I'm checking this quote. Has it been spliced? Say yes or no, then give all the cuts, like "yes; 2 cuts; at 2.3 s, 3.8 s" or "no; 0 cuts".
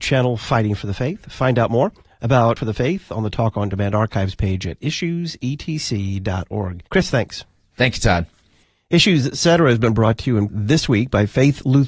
yes; 3 cuts; at 2.6 s, 6.9 s, 10.5 s